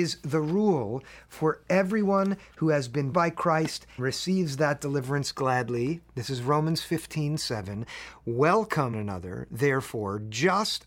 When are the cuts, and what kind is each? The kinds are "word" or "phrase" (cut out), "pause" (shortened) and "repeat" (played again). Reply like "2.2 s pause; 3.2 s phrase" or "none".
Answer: 3.1 s word; 4.0 s word; 8.9 s word